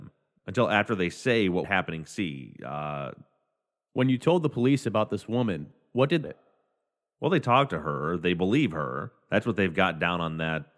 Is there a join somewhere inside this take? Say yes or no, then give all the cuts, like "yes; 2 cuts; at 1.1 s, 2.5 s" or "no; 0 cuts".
yes; 2 cuts; at 1.6 s, 6.2 s